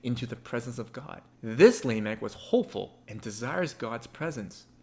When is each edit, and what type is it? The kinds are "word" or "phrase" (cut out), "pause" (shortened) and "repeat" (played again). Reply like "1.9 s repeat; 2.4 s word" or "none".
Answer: 1.3 s pause